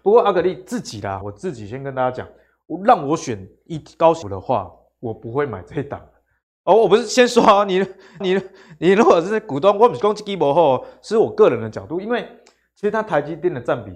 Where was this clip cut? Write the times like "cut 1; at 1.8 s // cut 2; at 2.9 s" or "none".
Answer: cut 1; at 1.2 s // cut 2; at 4.2 s // cut 3; at 8.2 s